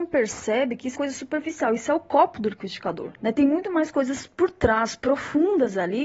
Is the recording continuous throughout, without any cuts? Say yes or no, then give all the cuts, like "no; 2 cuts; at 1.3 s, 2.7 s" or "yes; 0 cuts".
no; 2 cuts; at 0.9 s, 3.2 s